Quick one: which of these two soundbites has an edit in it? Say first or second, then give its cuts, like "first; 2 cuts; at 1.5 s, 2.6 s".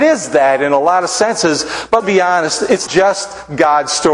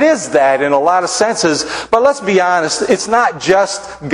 first; 2 cuts; at 2.0 s, 2.9 s